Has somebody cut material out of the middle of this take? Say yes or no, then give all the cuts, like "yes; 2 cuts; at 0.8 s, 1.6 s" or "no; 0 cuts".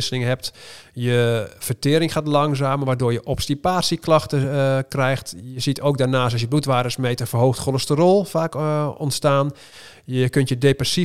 no; 0 cuts